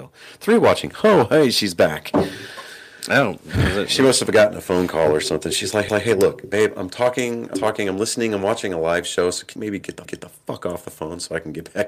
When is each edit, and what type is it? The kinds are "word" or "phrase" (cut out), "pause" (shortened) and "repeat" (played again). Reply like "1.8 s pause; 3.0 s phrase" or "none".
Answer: 3.4 s pause; 5.9 s repeat; 7.5 s word; 9.6 s phrase; 10.0 s repeat